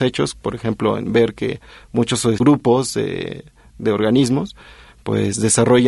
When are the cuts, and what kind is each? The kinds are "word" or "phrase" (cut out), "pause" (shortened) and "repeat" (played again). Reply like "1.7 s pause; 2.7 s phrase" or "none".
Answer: none

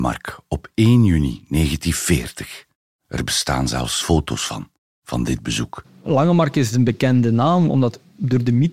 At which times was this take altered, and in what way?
none

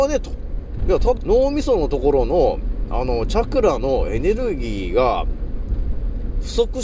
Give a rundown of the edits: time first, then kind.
1.2 s phrase

